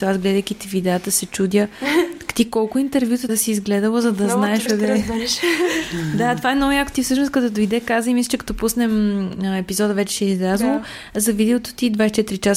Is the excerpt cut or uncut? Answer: cut